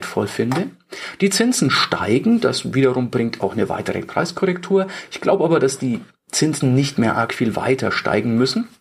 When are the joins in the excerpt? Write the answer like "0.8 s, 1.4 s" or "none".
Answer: none